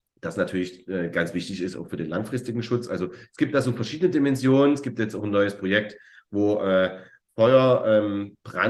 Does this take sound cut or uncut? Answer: uncut